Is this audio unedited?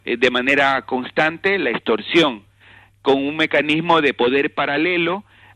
yes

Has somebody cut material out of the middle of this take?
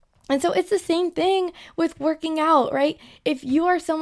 no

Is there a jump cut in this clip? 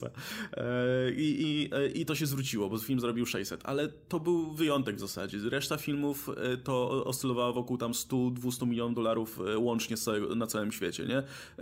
no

